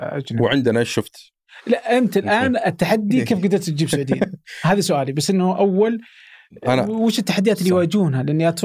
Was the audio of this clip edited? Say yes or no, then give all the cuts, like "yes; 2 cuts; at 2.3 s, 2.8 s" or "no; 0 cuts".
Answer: no; 0 cuts